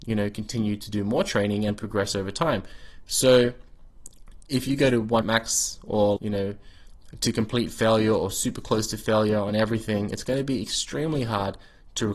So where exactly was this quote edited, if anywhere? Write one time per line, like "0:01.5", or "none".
0:05.2
0:06.2